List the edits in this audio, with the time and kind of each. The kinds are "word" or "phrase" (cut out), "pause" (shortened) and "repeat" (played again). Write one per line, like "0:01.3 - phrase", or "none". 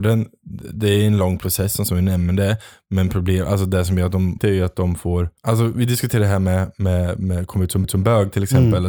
0:01.9 - word
0:04.4 - phrase
0:05.4 - pause
0:07.8 - repeat